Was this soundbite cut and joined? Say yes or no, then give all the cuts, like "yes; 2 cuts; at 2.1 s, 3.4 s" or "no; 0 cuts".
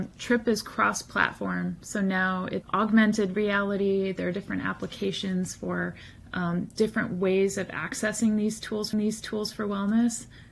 yes; 2 cuts; at 2.6 s, 8.9 s